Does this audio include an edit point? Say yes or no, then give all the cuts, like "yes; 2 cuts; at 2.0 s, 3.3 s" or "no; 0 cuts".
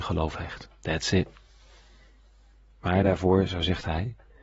no; 0 cuts